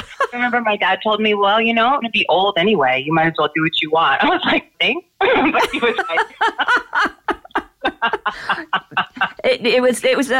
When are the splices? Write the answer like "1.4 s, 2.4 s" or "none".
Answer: 2.0 s, 4.7 s

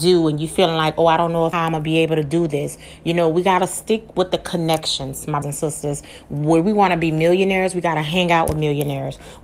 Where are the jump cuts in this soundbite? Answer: 1.5 s, 5.4 s

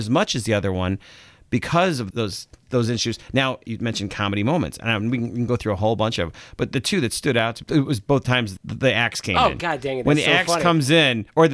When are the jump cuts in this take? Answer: 2.1 s, 2.6 s, 7.6 s, 8.6 s

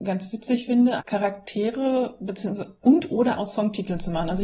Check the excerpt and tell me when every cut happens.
1.0 s, 2.8 s, 3.3 s

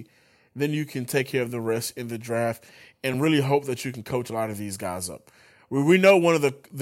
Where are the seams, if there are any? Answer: none

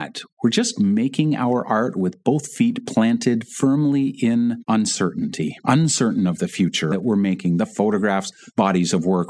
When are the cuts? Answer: 5.6 s, 6.9 s

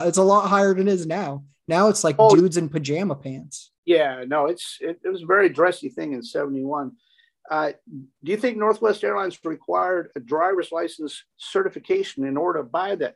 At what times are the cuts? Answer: none

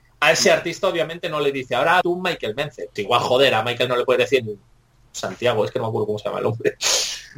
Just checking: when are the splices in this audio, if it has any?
2.0 s, 3.0 s, 3.9 s, 4.4 s

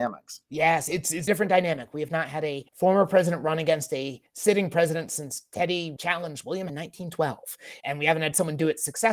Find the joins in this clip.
1.3 s, 2.7 s, 4.3 s, 6.0 s, 6.7 s, 7.8 s

